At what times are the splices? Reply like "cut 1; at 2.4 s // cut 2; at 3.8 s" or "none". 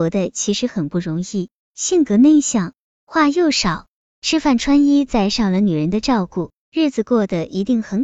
none